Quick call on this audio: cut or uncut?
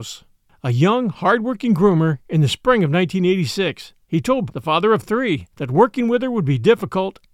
cut